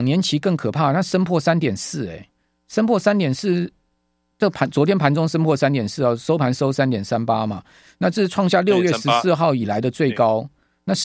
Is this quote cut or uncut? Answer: uncut